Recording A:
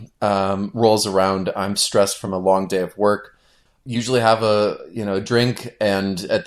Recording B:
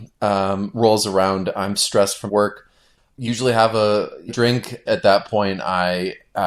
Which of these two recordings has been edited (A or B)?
B